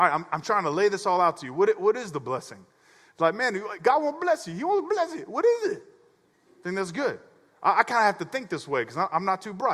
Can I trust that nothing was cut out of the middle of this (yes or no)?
yes